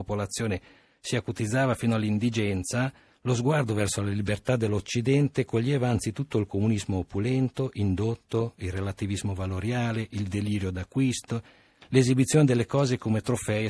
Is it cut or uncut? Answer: uncut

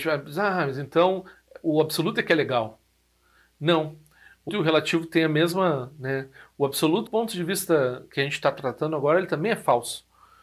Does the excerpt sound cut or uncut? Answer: cut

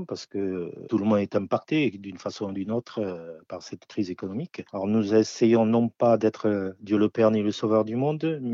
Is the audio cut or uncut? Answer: uncut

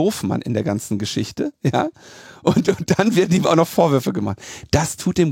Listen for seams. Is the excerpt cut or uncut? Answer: uncut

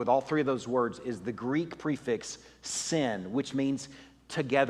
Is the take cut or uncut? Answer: uncut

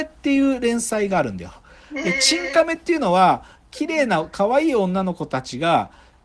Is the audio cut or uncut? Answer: uncut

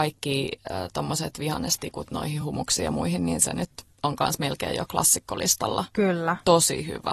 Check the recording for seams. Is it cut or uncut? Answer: uncut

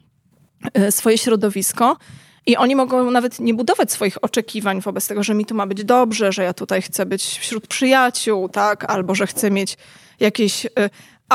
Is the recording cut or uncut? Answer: uncut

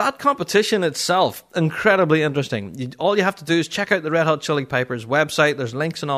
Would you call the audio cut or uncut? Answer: uncut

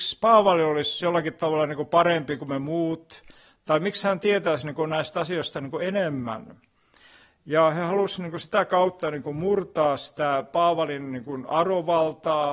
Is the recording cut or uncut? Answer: uncut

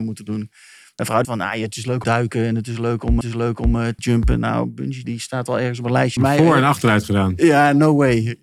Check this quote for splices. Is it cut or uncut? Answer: cut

